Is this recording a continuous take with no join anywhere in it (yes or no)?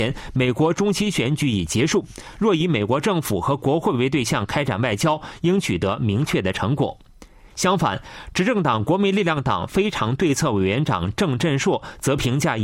yes